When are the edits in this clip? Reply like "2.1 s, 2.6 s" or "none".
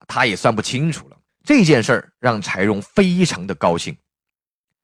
1.3 s